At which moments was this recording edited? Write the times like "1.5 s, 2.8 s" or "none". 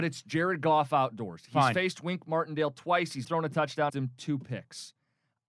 3.2 s, 3.9 s